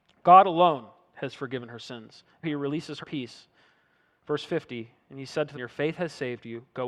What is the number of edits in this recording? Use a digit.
3